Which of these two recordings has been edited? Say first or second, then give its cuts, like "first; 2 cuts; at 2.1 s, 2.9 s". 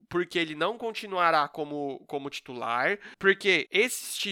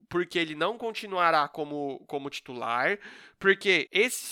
first; 1 cut; at 3.1 s